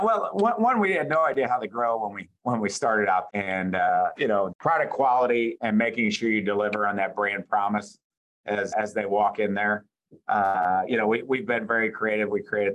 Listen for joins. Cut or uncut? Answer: cut